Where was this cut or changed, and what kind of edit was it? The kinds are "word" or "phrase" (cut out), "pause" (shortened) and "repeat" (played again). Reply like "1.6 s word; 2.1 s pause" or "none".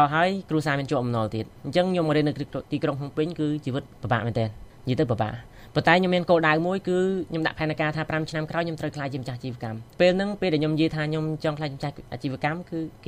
9.9 s pause